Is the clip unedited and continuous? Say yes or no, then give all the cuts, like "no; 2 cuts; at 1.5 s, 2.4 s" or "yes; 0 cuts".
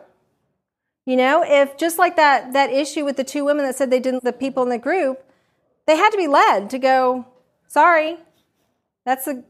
no; 1 cut; at 4.2 s